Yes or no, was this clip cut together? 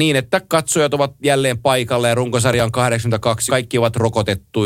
yes